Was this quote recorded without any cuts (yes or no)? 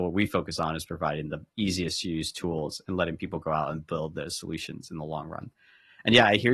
yes